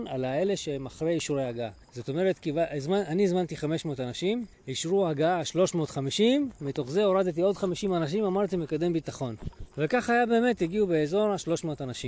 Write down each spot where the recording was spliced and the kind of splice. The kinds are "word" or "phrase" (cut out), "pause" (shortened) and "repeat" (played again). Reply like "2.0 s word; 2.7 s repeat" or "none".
1.8 s pause; 4.5 s pause; 9.7 s pause